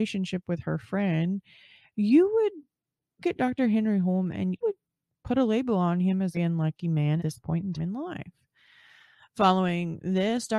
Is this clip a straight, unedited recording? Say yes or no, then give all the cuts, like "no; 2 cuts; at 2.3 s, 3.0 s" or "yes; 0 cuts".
no; 5 cuts; at 3.2 s, 4.6 s, 6.3 s, 7.2 s, 7.8 s